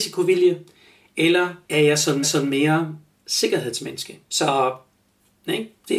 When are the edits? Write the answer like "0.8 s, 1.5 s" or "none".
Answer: 1.6 s, 2.2 s, 4.2 s